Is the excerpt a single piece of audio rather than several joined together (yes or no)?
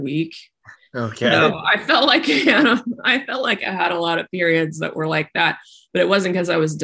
yes